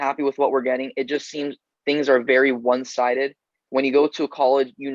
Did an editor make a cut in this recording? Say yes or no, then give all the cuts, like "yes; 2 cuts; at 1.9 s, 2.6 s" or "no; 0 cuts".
no; 0 cuts